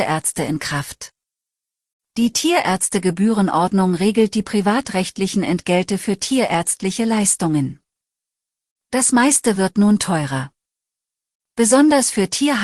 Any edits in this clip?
no; 0 cuts

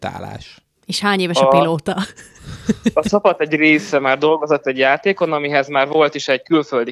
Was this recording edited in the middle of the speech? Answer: no; 0 cuts

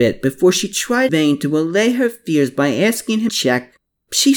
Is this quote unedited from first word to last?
no; 2 cuts; at 1.1 s, 3.3 s

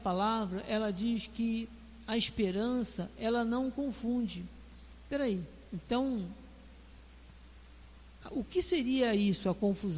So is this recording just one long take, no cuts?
no; 1 cut; at 5.7 s

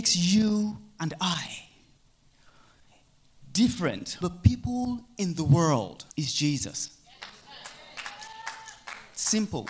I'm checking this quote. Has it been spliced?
yes; 2 cuts; at 4.2 s, 6.1 s

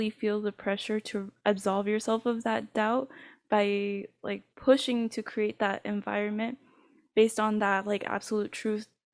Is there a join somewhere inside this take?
no; 0 cuts

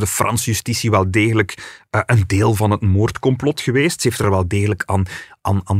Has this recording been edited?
no; 0 cuts

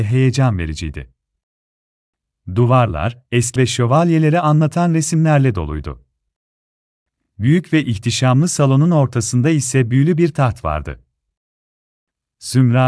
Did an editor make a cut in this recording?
yes; 1 cut; at 3.6 s

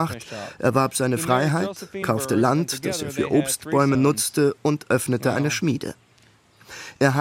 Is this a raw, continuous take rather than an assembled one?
yes; 0 cuts

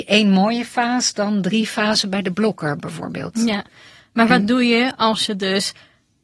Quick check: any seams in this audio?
no; 0 cuts

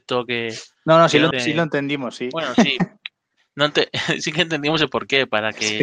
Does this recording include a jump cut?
yes; 1 cut; at 1.3 s

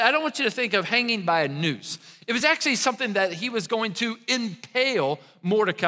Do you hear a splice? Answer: no; 0 cuts

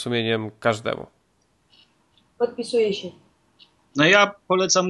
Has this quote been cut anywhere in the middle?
no; 0 cuts

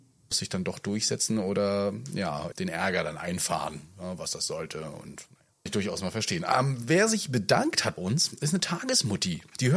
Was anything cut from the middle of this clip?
yes; 3 cuts; at 2.5 s, 5.7 s, 8.0 s

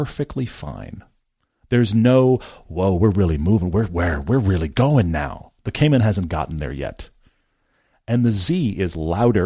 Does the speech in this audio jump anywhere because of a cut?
no; 0 cuts

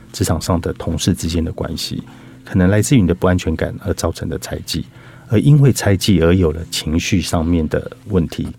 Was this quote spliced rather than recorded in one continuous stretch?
yes; 1 cut; at 2.4 s

